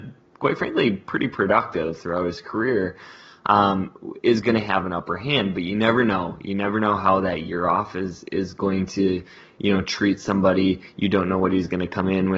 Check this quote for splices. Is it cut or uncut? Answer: uncut